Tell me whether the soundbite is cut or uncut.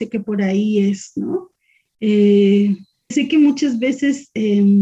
cut